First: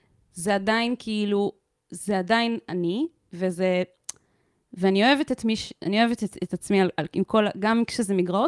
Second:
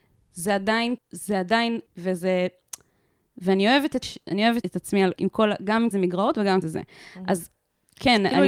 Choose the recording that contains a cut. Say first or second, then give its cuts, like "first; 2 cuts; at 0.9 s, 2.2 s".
second; 7 cuts; at 1.0 s, 1.9 s, 4.0 s, 4.6 s, 5.2 s, 5.9 s, 6.6 s